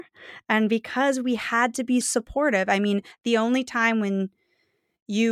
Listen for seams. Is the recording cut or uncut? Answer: cut